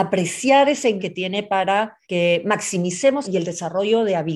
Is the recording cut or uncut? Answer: cut